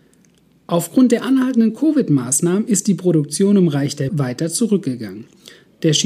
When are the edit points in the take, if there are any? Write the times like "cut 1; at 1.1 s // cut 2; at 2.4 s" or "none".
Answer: cut 1; at 4.1 s